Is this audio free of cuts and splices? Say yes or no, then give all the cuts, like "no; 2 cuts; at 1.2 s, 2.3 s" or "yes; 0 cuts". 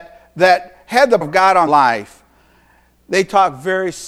no; 2 cuts; at 1.2 s, 1.7 s